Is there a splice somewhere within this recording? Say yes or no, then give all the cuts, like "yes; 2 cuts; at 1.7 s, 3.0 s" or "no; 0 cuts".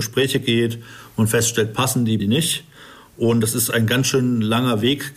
yes; 1 cut; at 2.2 s